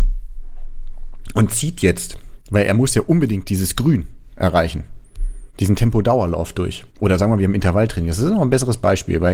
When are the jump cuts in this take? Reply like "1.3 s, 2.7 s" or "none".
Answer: 2.4 s, 5.5 s, 6.9 s